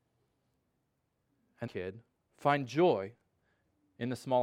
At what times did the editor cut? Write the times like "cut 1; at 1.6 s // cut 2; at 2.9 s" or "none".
cut 1; at 1.7 s // cut 2; at 2.3 s